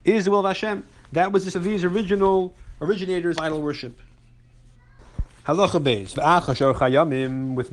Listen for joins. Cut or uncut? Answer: cut